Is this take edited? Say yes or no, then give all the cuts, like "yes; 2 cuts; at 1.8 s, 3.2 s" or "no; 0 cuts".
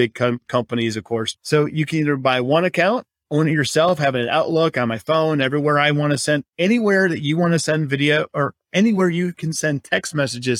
no; 0 cuts